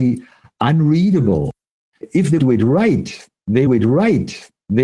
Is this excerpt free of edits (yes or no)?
no